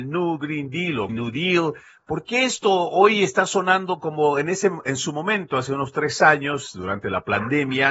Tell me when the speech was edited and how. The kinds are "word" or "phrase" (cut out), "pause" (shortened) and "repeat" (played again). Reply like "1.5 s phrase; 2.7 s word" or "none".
1.1 s word